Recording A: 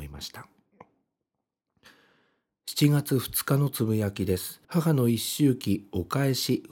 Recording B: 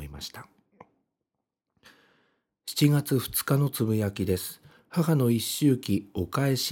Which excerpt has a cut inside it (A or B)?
A